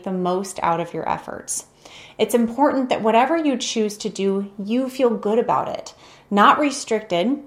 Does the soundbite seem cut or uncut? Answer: uncut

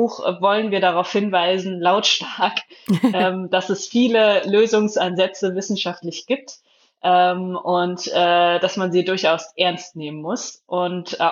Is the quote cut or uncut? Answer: uncut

